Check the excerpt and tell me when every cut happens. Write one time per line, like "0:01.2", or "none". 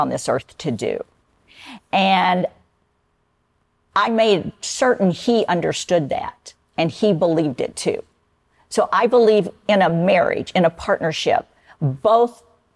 none